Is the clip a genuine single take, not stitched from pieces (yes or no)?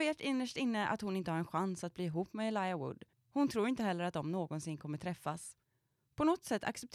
no